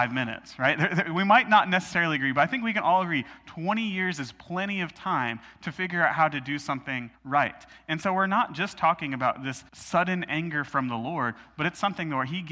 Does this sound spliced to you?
yes; 2 cuts; at 7.1 s, 9.7 s

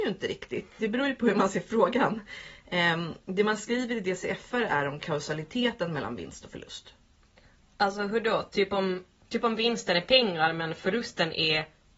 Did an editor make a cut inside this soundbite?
no; 0 cuts

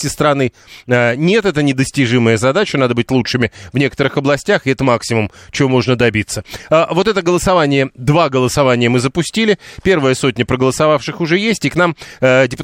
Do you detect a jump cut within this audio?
no; 0 cuts

